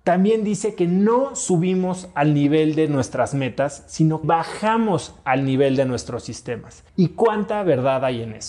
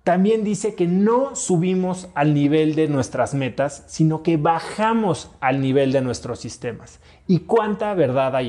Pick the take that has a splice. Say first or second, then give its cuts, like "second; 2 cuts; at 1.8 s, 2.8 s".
first; 2 cuts; at 4.2 s, 6.9 s